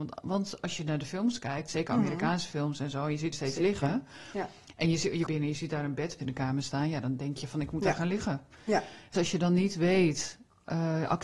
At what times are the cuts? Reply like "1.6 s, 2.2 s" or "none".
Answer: 3.3 s, 5.3 s, 6.2 s, 9.1 s